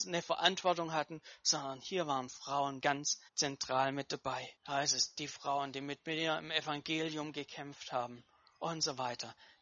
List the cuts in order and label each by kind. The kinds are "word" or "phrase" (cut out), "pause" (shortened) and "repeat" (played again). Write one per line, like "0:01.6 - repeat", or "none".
0:02.8 - word
0:03.3 - pause
0:04.6 - pause